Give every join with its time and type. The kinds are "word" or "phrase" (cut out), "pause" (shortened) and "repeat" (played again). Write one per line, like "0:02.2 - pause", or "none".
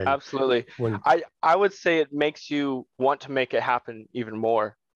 0:01.3 - pause
0:02.9 - pause